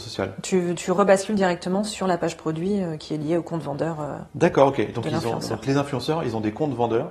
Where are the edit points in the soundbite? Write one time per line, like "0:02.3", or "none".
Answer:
0:04.3